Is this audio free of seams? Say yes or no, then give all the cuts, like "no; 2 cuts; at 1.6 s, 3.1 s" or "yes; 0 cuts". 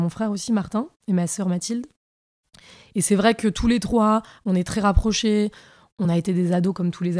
yes; 0 cuts